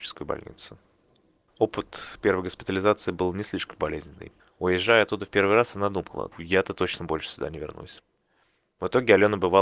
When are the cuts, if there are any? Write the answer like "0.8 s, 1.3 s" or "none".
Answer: 6.3 s